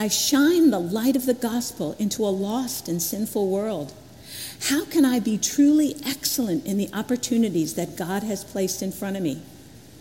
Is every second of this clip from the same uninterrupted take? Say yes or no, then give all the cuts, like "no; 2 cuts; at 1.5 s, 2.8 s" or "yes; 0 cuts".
yes; 0 cuts